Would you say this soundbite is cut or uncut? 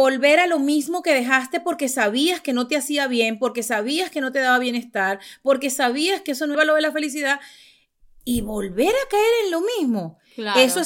cut